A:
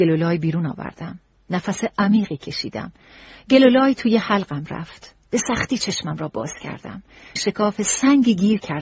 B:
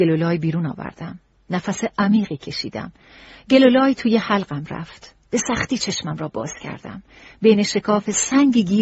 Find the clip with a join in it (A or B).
A